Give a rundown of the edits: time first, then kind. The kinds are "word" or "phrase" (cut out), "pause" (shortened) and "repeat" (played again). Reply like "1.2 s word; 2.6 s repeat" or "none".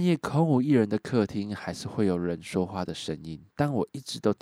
3.5 s pause